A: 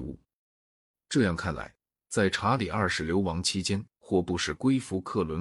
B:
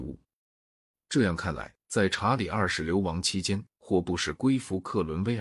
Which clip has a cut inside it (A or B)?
B